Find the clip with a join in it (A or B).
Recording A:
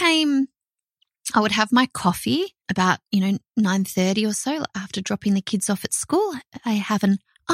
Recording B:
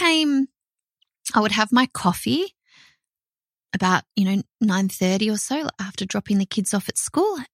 A